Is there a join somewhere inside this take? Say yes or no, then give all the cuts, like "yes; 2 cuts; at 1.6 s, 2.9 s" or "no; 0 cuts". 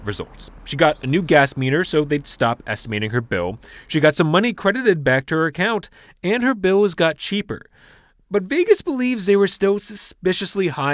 no; 0 cuts